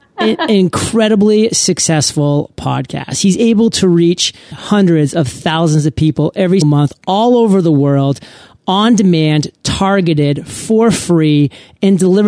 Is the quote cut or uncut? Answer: cut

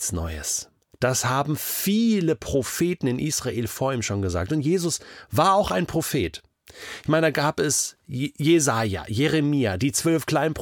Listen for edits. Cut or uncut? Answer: uncut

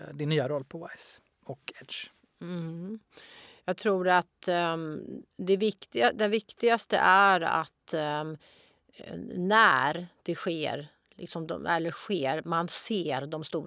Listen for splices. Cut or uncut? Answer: uncut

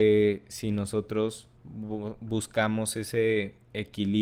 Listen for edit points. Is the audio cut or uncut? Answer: cut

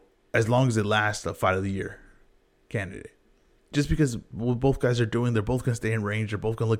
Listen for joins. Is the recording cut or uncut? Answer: uncut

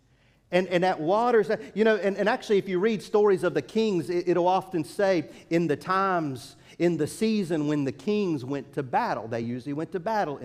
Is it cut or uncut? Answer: uncut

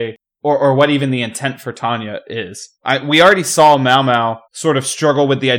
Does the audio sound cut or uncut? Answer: cut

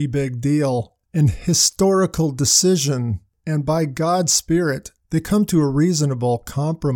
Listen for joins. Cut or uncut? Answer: uncut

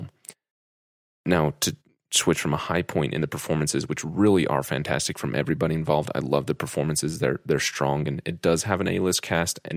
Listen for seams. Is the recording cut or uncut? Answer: uncut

